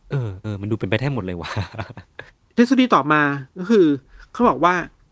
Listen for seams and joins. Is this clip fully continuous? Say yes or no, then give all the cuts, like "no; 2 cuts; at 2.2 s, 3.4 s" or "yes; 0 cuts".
yes; 0 cuts